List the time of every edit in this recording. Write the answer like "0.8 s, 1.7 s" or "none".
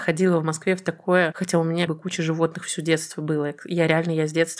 1.9 s